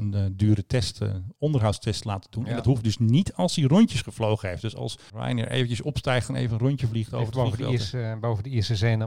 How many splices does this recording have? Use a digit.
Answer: 0